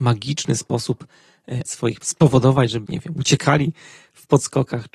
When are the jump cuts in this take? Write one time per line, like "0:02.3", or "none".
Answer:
0:01.6
0:02.0
0:02.9